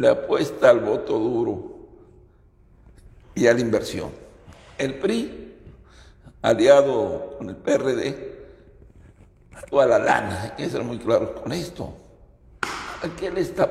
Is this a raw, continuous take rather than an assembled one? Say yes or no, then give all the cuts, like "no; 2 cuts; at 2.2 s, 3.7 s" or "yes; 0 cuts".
no; 2 cuts; at 3.2 s, 9.7 s